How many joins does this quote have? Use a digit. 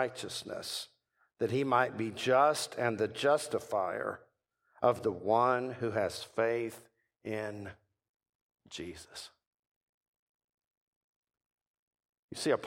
0